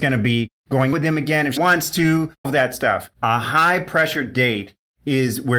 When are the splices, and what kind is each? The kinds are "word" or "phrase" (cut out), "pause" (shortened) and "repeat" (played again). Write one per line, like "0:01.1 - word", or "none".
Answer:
0:00.9 - word
0:01.6 - word
0:02.4 - word
0:03.1 - pause

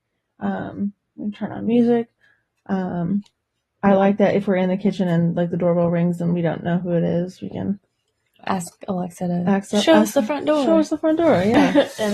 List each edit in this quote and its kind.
none

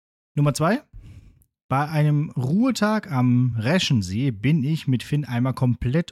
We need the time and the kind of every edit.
none

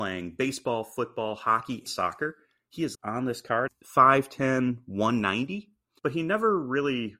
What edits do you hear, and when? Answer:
0:01.9 - word
0:02.9 - word
0:03.7 - word

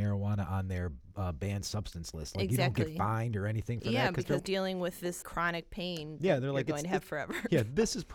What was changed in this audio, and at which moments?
0:04.4 - word
0:05.2 - word

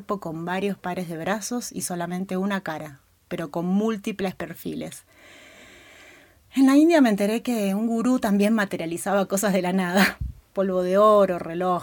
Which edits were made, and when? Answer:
none

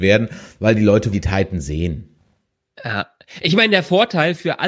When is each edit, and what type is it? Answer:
0:01.1 - word

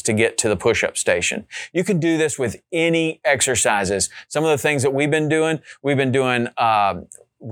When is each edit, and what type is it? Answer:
none

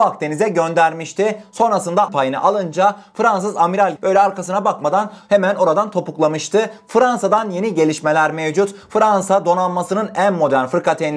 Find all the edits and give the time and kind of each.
0:02.1 - word
0:04.0 - word

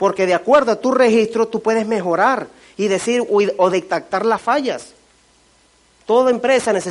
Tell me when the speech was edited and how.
none

